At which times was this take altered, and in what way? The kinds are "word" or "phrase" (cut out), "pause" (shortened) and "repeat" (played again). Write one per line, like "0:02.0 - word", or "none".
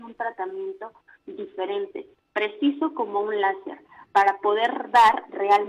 none